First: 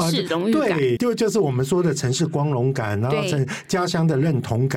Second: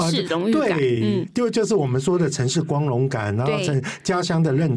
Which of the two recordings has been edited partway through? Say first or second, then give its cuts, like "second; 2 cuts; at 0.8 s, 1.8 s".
first; 1 cut; at 1.0 s